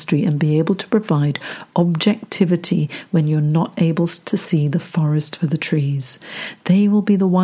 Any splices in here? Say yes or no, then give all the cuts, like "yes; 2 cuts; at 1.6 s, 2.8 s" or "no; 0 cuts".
no; 0 cuts